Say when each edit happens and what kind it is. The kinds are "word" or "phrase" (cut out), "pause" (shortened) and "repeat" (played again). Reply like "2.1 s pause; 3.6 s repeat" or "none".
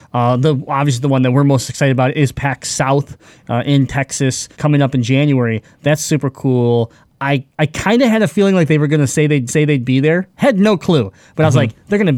4.5 s pause; 7.5 s pause; 9.5 s repeat